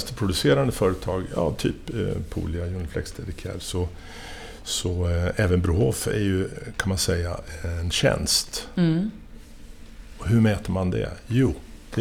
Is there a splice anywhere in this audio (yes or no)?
no